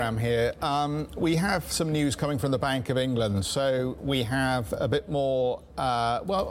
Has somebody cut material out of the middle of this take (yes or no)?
no